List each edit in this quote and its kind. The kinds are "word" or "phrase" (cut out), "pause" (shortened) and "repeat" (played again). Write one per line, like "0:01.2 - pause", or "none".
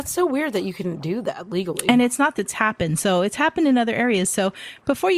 0:02.4 - phrase